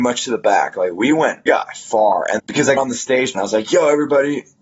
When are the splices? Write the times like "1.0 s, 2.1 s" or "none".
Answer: 1.5 s, 2.4 s, 2.8 s, 3.3 s